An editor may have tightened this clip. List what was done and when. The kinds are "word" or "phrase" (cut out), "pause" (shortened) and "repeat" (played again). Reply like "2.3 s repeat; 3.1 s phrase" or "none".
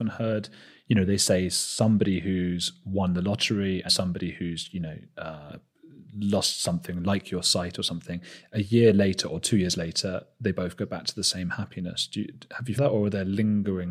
3.9 s word; 12.8 s word